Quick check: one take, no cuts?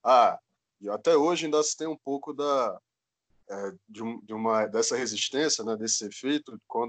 yes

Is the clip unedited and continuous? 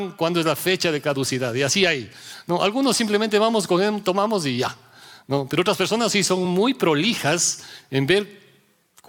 yes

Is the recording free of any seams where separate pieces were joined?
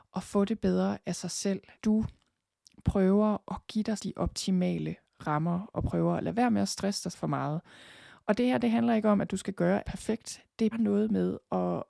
no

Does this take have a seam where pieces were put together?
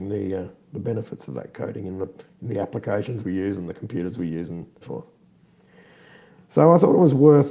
yes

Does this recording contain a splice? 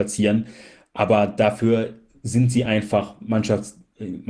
no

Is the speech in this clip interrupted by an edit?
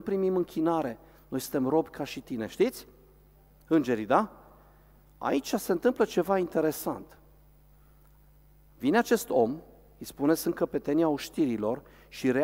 no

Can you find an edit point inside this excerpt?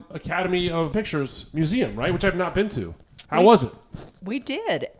yes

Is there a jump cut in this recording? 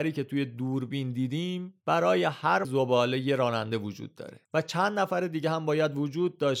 yes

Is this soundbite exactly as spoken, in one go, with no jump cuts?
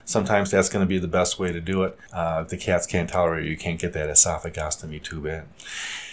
no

